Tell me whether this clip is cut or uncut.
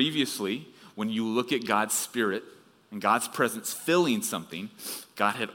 uncut